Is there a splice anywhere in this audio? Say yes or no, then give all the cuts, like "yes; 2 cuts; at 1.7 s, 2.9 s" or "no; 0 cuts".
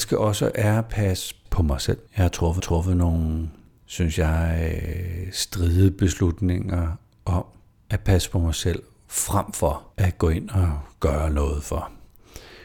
yes; 4 cuts; at 1.5 s, 2.1 s, 2.6 s, 9.9 s